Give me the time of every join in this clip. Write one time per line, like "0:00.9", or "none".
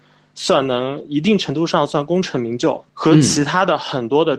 0:02.9